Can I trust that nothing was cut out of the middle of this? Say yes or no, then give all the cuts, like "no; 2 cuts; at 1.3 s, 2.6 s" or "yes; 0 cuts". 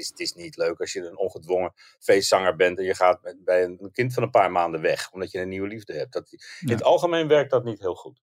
yes; 0 cuts